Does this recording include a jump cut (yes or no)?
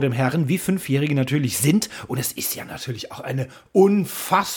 no